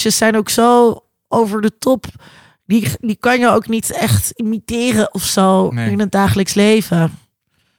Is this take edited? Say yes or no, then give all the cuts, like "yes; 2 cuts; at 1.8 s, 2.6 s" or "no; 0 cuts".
no; 0 cuts